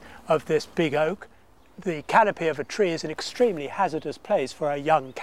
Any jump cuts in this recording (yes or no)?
no